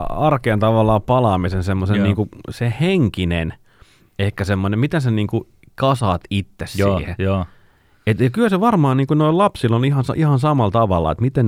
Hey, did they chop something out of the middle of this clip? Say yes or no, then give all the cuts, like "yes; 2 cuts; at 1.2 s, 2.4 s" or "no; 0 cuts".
no; 0 cuts